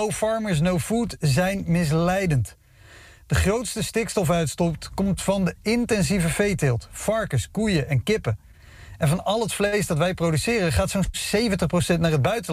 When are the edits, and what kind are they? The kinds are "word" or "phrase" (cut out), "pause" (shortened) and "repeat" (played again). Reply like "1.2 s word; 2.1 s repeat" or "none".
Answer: none